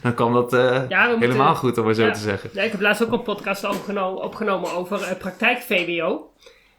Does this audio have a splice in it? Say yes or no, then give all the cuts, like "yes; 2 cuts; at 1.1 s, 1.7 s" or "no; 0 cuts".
no; 0 cuts